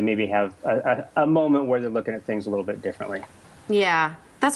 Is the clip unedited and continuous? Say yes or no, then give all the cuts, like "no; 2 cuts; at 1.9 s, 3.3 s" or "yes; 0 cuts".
yes; 0 cuts